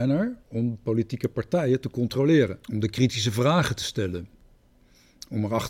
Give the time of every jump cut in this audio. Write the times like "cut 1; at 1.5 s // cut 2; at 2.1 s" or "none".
cut 1; at 2.6 s

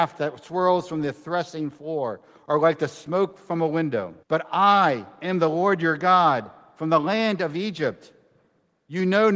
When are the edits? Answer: cut 1; at 4.2 s

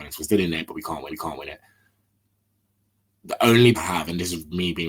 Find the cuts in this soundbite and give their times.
cut 1; at 1.1 s // cut 2; at 3.7 s

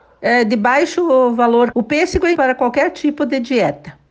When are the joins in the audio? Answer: cut 1; at 1.7 s // cut 2; at 2.3 s

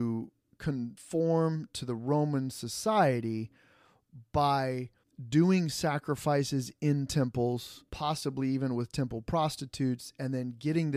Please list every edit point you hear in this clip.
cut 1; at 7.9 s

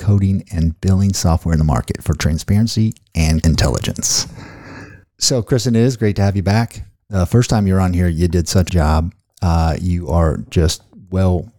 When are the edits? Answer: cut 1; at 3.1 s // cut 2; at 3.4 s // cut 3; at 8.7 s

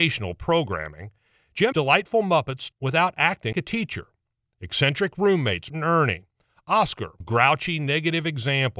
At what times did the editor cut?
cut 1; at 1.7 s // cut 2; at 2.7 s // cut 3; at 3.5 s // cut 4; at 5.7 s // cut 5; at 7.2 s

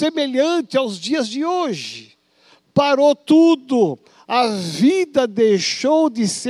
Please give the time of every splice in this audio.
none

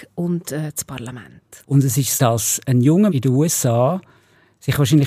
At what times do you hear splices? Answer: cut 1; at 2.2 s // cut 2; at 3.1 s

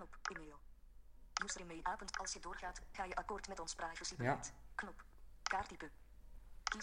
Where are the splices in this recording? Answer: cut 1; at 1.8 s // cut 2; at 2.9 s

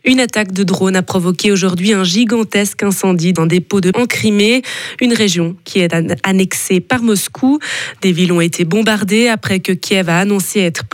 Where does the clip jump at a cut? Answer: cut 1; at 3.4 s // cut 2; at 3.9 s

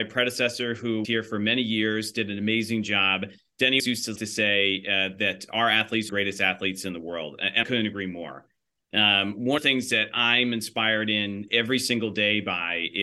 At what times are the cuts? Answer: cut 1; at 1.0 s // cut 2; at 3.8 s // cut 3; at 4.2 s // cut 4; at 6.1 s // cut 5; at 7.6 s // cut 6; at 9.6 s // cut 7; at 11.5 s

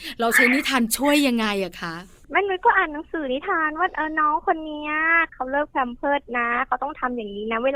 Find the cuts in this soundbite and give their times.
none

